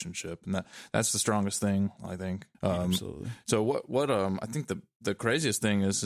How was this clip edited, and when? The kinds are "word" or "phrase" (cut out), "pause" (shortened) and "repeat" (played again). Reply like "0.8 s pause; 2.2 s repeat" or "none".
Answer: 2.5 s pause